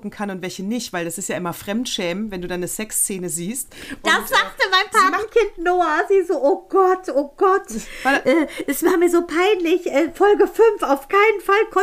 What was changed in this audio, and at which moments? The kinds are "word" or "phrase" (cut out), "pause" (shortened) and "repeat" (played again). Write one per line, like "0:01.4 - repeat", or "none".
none